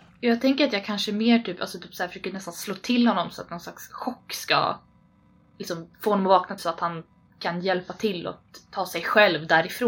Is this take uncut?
no; 2 cuts; at 5.9 s, 6.6 s

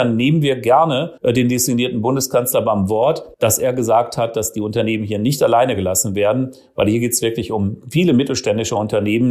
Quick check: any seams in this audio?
yes; 2 cuts; at 1.2 s, 3.3 s

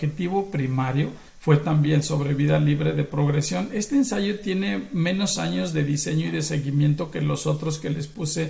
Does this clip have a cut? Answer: yes; 1 cut; at 1.3 s

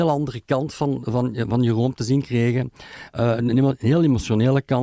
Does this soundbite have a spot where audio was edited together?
no; 0 cuts

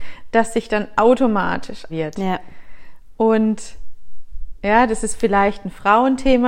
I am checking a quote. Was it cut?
yes; 1 cut; at 1.9 s

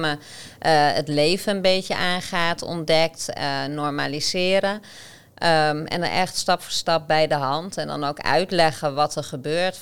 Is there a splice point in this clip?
no; 0 cuts

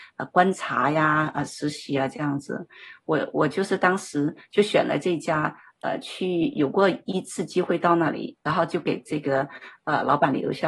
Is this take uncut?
yes; 0 cuts

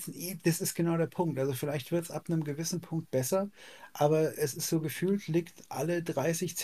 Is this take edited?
no; 0 cuts

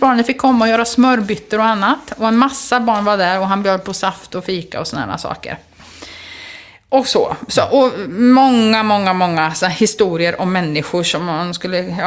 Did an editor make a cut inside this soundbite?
no; 0 cuts

